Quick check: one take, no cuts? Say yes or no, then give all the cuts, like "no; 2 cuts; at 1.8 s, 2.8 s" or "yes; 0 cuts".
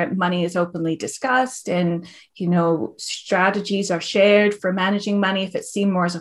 yes; 0 cuts